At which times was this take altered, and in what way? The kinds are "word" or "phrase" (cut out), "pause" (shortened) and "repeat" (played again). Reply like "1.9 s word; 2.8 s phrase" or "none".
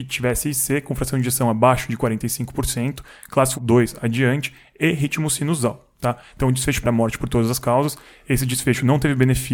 3.5 s word; 6.8 s word